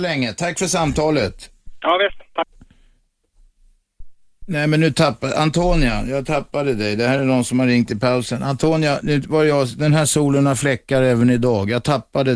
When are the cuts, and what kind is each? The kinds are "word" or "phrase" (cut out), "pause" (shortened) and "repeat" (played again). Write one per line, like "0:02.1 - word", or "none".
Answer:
none